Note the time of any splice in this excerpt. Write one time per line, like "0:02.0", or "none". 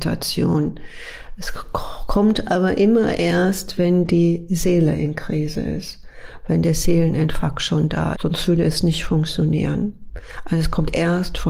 0:08.1